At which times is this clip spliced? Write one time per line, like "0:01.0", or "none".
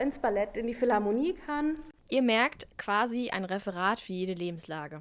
0:02.7